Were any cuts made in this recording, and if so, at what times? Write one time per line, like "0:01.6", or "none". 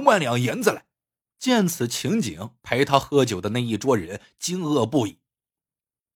0:01.2
0:02.6